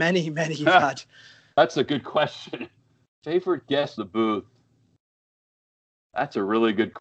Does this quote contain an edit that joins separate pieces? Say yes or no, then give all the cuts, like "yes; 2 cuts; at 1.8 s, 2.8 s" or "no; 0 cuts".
yes; 2 cuts; at 2.8 s, 4.0 s